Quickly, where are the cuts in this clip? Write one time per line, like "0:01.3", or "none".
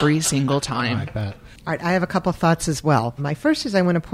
0:01.6